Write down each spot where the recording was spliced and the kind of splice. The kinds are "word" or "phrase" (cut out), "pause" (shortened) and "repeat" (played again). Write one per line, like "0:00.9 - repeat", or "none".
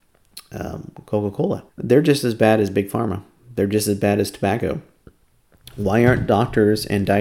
0:01.7 - pause